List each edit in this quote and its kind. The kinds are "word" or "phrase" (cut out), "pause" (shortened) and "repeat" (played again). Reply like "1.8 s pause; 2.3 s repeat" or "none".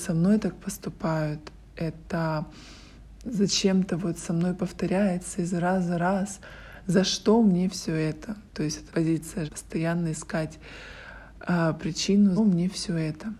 8.9 s word; 9.5 s word; 12.4 s phrase